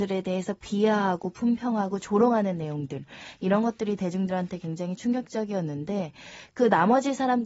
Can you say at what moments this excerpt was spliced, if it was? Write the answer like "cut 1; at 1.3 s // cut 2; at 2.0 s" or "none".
none